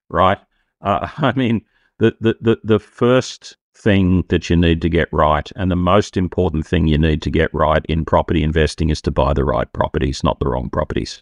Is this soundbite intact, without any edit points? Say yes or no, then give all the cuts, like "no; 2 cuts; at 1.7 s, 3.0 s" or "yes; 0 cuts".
yes; 0 cuts